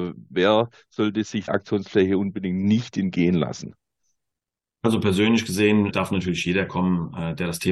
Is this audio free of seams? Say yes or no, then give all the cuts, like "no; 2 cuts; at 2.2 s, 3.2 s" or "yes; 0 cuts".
no; 2 cuts; at 1.5 s, 5.9 s